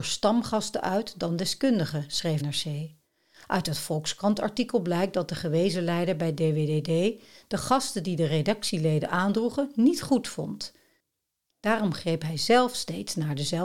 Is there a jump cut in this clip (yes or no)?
yes